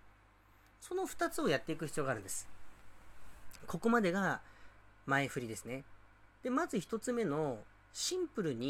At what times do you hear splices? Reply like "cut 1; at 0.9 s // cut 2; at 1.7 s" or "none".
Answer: cut 1; at 6.3 s